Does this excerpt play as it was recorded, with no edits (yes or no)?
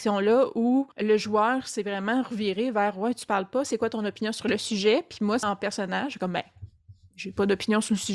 no